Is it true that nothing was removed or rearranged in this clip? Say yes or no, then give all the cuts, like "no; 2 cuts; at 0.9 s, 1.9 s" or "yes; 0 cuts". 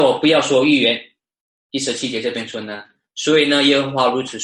yes; 0 cuts